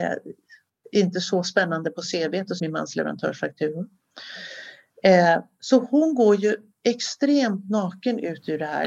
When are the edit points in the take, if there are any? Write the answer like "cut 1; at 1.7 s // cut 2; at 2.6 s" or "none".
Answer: cut 1; at 2.6 s